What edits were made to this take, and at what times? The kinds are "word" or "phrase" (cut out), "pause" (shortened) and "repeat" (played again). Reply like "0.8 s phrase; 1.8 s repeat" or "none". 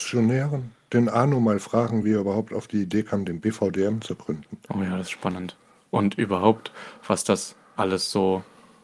none